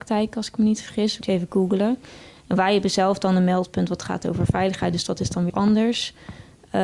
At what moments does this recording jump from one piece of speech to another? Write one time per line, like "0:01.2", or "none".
0:01.2
0:05.5